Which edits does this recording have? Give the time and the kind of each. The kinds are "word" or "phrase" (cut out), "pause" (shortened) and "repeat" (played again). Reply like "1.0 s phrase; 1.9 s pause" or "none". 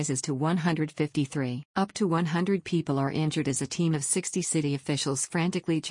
1.7 s pause